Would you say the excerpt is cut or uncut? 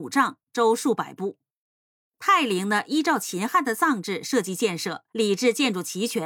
cut